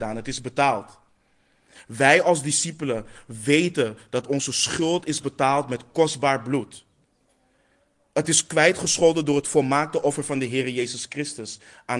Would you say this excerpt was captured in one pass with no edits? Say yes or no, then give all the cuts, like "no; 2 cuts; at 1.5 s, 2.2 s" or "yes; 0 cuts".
yes; 0 cuts